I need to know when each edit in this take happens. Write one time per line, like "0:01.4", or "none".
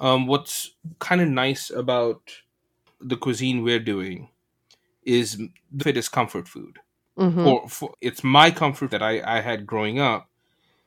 0:03.0
0:05.8
0:07.9
0:08.9